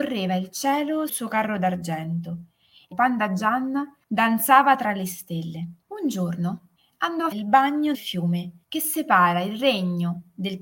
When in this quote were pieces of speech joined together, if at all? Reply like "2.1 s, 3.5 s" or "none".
1.1 s, 2.9 s, 4.0 s, 5.8 s, 6.8 s, 7.3 s, 7.9 s, 8.6 s